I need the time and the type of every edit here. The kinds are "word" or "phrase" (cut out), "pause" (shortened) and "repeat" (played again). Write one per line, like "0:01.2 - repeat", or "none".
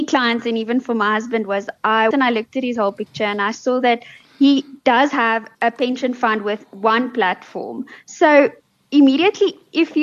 0:02.1 - word
0:05.5 - pause